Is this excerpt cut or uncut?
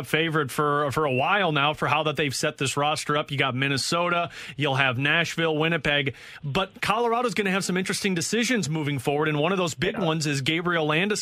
uncut